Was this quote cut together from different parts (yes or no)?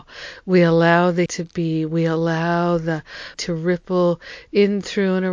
yes